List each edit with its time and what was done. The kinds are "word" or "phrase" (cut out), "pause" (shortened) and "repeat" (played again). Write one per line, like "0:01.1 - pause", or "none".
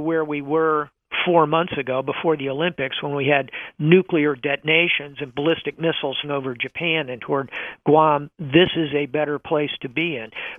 0:06.2 - word
0:07.2 - word